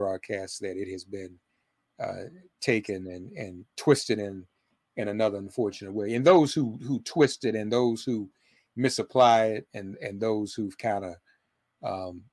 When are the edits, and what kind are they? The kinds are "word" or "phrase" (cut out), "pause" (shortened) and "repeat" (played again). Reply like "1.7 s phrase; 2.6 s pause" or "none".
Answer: none